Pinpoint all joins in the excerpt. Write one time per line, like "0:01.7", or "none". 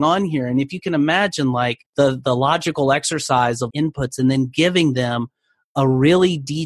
0:01.9
0:03.7